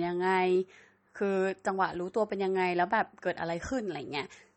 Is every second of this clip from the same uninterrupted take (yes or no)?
yes